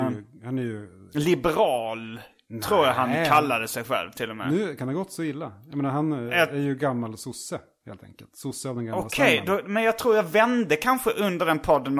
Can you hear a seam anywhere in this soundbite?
yes; 1 cut; at 4.8 s

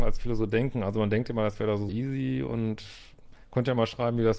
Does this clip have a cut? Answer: yes; 1 cut; at 1.9 s

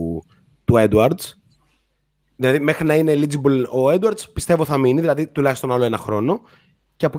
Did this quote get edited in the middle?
no; 0 cuts

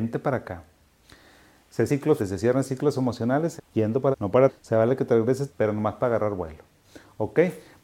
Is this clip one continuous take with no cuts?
no; 6 cuts; at 1.9 s, 2.2 s, 3.6 s, 4.1 s, 4.5 s, 5.5 s

